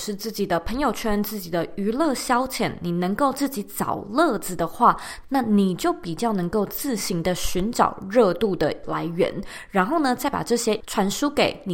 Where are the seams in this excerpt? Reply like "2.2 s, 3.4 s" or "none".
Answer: 8.8 s, 10.8 s